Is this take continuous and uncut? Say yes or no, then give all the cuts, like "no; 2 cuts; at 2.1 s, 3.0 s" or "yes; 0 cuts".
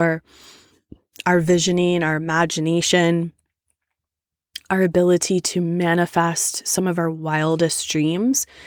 yes; 0 cuts